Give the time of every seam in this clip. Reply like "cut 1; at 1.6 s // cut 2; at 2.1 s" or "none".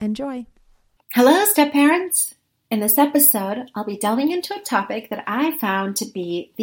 none